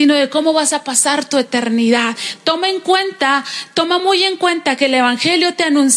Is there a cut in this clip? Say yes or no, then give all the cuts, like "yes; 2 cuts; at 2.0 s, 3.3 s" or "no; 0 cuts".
no; 0 cuts